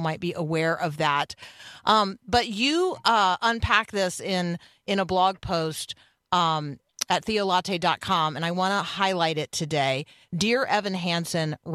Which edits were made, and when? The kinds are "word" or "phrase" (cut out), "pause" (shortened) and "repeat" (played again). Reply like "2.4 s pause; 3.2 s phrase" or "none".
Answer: none